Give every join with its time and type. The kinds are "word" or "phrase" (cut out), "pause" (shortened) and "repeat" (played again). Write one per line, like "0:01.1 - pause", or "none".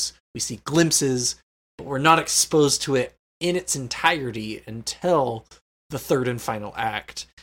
none